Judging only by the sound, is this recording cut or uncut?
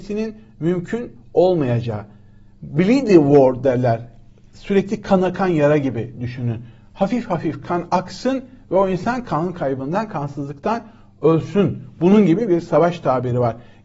uncut